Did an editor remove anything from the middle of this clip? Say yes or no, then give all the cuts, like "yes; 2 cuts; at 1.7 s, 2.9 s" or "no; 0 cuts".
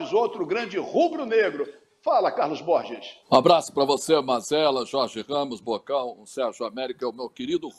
yes; 1 cut; at 3.2 s